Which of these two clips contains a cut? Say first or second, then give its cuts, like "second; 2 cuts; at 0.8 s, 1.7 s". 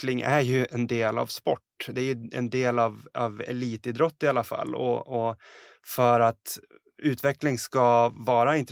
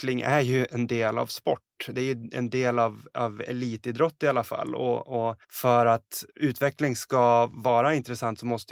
second; 2 cuts; at 5.4 s, 6.3 s